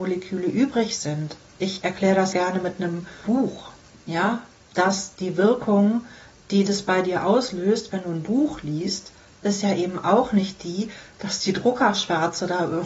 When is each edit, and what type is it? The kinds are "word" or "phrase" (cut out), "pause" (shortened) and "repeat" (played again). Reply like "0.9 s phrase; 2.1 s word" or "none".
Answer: 2.3 s word